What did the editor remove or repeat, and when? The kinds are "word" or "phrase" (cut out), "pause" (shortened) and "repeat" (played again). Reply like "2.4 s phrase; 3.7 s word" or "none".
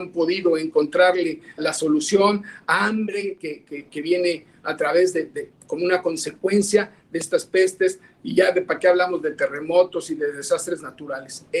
1.6 s word